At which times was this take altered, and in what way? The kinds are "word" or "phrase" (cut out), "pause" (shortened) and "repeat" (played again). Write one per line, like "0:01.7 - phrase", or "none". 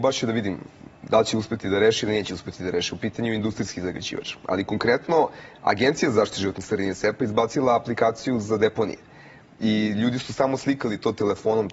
none